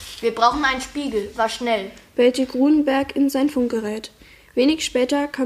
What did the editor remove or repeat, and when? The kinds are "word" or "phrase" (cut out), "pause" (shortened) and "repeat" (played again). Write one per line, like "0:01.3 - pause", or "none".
0:01.3 - word